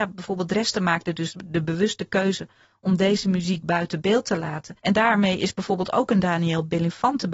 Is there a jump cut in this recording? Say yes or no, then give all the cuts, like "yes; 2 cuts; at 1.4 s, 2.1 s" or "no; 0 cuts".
yes; 1 cut; at 4.8 s